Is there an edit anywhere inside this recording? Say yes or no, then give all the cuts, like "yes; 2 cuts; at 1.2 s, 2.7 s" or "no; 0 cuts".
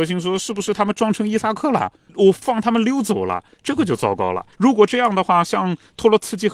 yes; 1 cut; at 4.5 s